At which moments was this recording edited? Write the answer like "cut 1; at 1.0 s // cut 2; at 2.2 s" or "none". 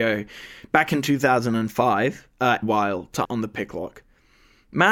cut 1; at 2.6 s // cut 2; at 3.2 s